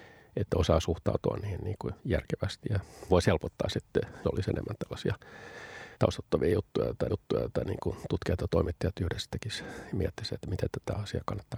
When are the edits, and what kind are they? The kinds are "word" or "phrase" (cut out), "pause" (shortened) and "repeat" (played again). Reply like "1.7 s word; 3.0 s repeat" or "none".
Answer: 2.0 s pause; 3.1 s word; 4.2 s word; 5.9 s pause; 7.1 s repeat